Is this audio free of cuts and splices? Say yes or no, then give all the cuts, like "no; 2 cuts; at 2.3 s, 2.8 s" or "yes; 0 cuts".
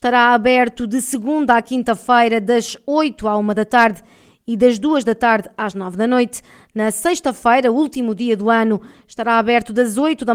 yes; 0 cuts